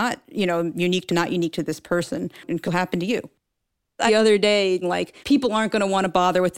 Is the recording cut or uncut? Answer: cut